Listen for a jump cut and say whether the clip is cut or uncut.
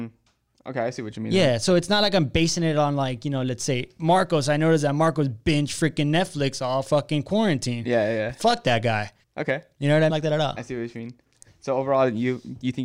cut